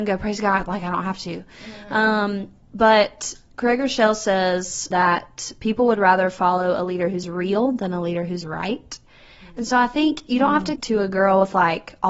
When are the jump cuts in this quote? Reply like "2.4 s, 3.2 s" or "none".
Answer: 4.9 s, 7.2 s, 8.4 s, 10.8 s